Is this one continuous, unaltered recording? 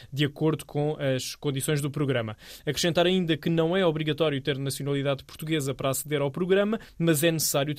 yes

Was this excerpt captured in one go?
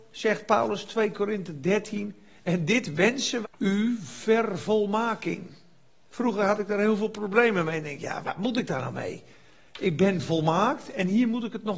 no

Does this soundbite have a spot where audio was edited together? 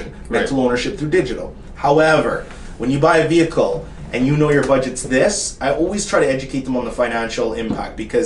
no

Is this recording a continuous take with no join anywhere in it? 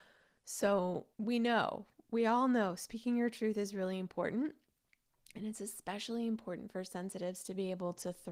no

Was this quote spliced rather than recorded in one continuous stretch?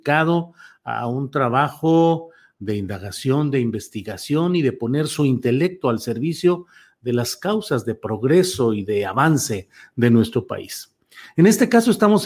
no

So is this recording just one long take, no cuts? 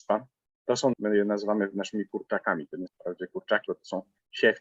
no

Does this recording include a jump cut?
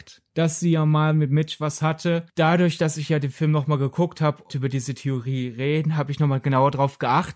yes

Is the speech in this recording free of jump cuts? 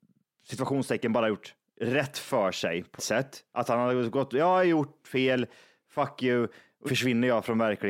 no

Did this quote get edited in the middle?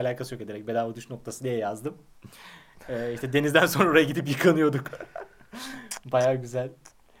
no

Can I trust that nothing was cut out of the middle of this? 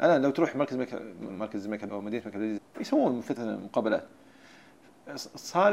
no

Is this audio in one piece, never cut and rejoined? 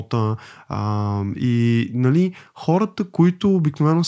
yes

